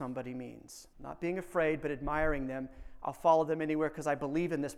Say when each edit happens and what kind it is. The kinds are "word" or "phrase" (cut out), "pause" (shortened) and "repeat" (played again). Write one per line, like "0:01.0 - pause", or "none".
0:00.9 - pause